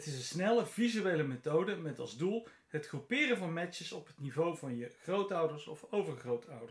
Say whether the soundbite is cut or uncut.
uncut